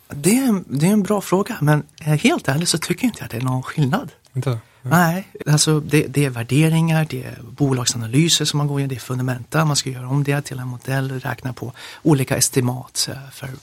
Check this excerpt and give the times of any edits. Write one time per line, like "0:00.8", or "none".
0:05.4